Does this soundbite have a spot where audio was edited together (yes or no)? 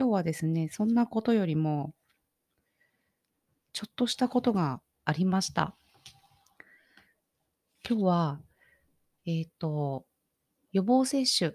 no